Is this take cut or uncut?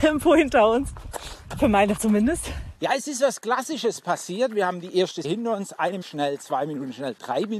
cut